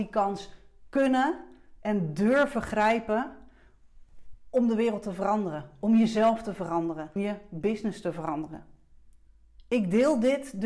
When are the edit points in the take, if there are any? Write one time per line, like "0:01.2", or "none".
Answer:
0:07.2